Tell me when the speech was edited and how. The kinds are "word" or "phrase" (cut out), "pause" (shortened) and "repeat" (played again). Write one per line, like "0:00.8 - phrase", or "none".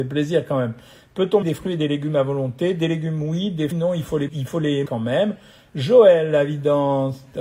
0:01.4 - word
0:03.7 - word
0:04.3 - word
0:04.9 - word